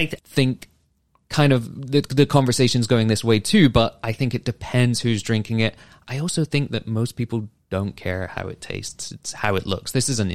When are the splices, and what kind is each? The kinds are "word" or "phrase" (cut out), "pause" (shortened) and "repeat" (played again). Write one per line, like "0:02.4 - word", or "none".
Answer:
none